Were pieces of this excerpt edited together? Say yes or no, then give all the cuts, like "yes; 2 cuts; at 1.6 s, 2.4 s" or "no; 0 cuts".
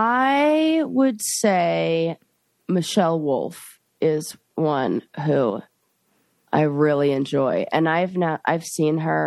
no; 0 cuts